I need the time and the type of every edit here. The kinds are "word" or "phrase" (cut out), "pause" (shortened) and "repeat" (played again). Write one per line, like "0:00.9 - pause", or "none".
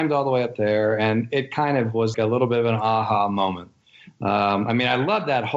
0:02.1 - word